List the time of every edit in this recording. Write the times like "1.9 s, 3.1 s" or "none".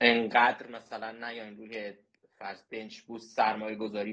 none